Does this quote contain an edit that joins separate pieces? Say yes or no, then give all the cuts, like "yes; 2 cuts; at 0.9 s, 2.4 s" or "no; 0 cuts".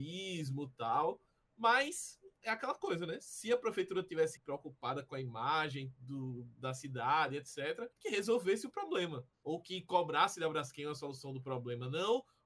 yes; 3 cuts; at 4.4 s, 7.9 s, 9.3 s